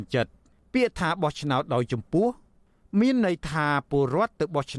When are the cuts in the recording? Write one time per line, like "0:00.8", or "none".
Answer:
none